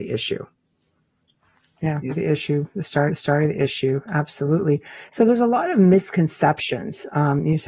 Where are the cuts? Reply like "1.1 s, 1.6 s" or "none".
2.1 s, 3.1 s